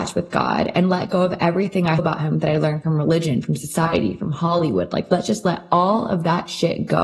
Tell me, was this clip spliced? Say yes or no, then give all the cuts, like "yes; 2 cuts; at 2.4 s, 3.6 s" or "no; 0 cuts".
yes; 1 cut; at 2.0 s